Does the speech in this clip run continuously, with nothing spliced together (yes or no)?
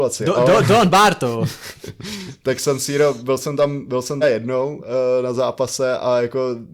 no